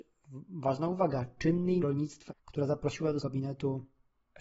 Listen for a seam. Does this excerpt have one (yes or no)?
yes